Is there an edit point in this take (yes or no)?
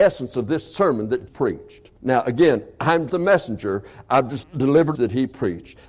yes